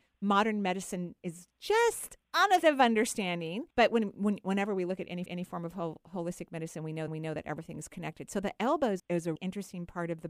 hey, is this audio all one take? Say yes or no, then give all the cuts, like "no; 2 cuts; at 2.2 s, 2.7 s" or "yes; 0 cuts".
no; 7 cuts; at 2.2 s, 2.6 s, 3.7 s, 5.3 s, 7.1 s, 9.0 s, 9.4 s